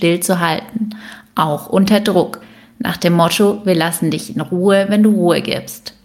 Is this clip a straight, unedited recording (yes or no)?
yes